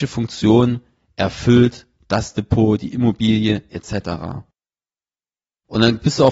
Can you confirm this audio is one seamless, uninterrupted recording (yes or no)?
yes